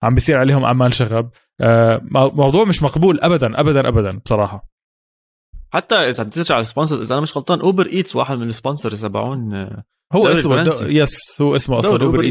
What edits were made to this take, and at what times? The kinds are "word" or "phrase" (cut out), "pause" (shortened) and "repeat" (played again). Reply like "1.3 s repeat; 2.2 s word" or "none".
none